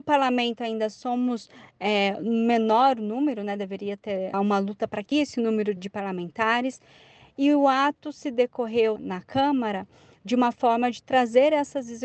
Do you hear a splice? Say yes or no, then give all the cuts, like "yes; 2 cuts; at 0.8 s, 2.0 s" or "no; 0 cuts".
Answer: yes; 4 cuts; at 4.3 s, 5.1 s, 5.8 s, 9.0 s